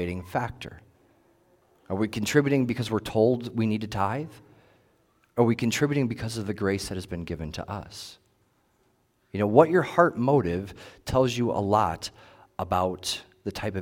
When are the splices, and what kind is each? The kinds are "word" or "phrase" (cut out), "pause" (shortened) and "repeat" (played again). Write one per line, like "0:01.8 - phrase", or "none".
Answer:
none